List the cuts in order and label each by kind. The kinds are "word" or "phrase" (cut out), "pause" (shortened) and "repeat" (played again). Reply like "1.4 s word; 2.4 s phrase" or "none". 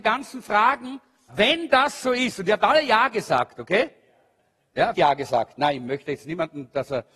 1.3 s word; 4.9 s phrase